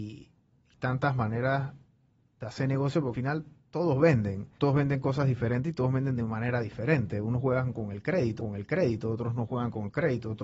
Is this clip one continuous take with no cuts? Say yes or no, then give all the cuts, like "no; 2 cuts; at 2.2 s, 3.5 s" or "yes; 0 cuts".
no; 3 cuts; at 3.1 s, 4.6 s, 8.4 s